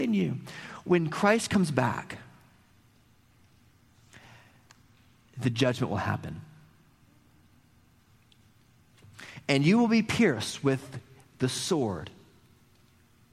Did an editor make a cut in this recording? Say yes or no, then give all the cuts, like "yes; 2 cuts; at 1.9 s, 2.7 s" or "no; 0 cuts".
no; 0 cuts